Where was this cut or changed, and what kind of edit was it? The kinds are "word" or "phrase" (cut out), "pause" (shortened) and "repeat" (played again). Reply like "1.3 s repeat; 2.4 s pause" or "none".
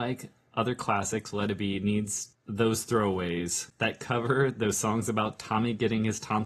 4.0 s word